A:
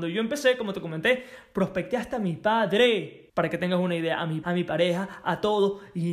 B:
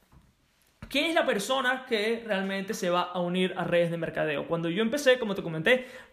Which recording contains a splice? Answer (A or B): A